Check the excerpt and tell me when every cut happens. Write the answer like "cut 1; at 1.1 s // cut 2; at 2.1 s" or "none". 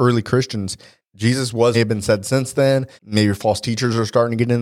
cut 1; at 1.7 s // cut 2; at 3.0 s